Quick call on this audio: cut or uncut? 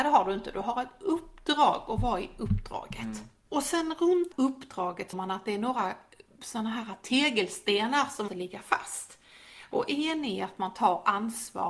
cut